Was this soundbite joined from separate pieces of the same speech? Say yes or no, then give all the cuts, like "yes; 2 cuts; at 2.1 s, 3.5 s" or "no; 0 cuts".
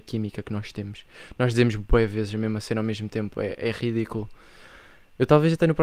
no; 0 cuts